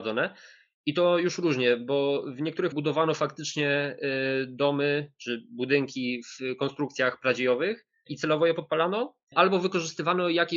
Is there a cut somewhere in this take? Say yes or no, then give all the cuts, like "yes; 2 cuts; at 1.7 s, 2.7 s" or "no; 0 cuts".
yes; 1 cut; at 2.7 s